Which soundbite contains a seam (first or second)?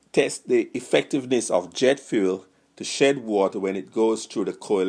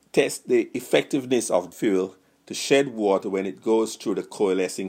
second